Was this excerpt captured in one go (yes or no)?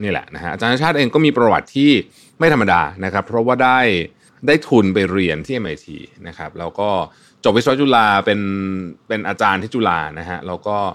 yes